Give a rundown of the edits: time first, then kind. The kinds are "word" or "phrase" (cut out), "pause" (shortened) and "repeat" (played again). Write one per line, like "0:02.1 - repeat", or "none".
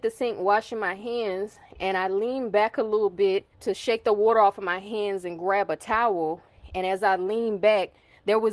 0:03.5 - pause